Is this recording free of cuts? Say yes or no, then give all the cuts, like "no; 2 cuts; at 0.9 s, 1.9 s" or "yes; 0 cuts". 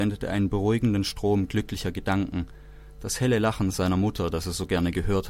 yes; 0 cuts